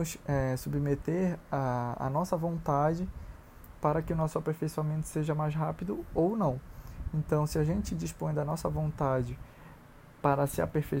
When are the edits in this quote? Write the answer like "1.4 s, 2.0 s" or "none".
none